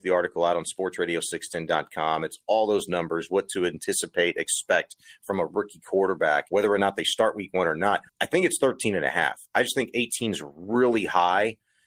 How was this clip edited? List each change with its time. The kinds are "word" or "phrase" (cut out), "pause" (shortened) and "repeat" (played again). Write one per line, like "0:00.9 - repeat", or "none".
0:08.1 - pause